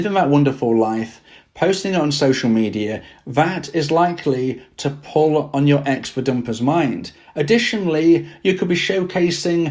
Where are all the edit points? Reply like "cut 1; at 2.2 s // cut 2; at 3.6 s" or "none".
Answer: none